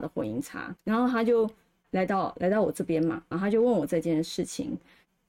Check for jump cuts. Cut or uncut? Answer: cut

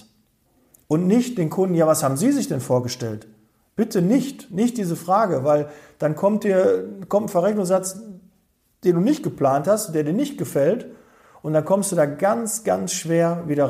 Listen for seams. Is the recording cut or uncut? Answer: uncut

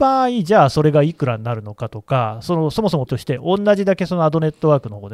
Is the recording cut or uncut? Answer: cut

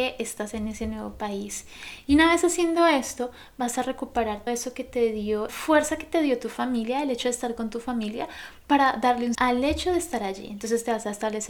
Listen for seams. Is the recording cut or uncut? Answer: cut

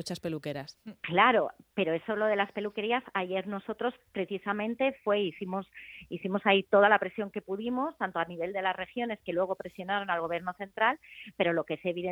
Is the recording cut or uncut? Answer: uncut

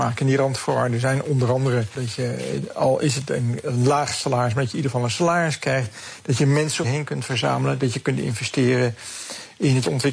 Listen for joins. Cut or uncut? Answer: cut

